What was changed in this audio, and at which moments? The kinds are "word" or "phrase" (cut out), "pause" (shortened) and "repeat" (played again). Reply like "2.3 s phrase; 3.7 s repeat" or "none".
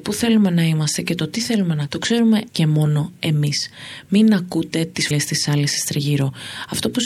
1.9 s word; 2.5 s word; 5.1 s word